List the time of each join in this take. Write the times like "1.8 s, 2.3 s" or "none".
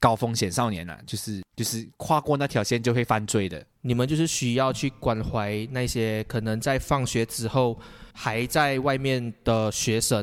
1.5 s, 8.1 s